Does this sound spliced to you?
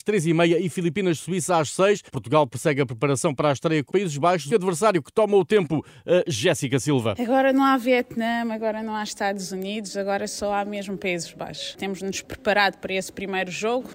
yes; 3 cuts; at 2.1 s, 3.9 s, 4.5 s

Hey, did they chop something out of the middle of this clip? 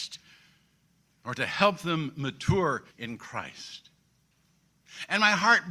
yes; 1 cut; at 2.9 s

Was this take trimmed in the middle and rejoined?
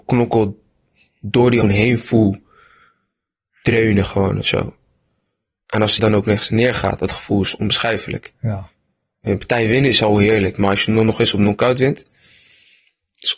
yes; 3 cuts; at 1.6 s, 6.0 s, 7.0 s

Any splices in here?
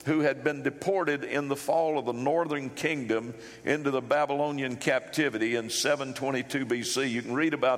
no; 0 cuts

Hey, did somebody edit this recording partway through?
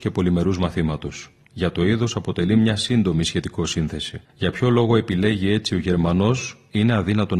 yes; 2 cuts; at 1.4 s, 4.2 s

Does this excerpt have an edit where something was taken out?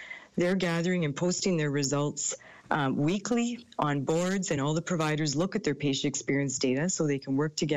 no; 0 cuts

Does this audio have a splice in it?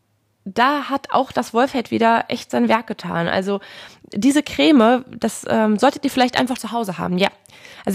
yes; 1 cut; at 6.6 s

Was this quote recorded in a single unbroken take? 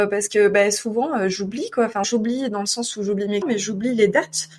no; 2 cuts; at 2.0 s, 3.4 s

